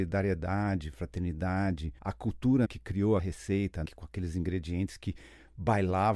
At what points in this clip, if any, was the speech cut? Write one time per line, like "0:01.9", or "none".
0:02.0
0:02.6
0:03.2
0:03.8